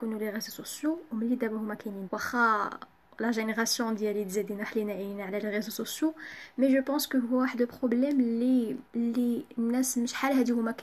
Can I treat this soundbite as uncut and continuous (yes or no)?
no